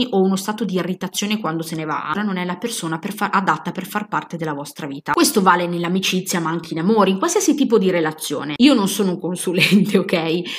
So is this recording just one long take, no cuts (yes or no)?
no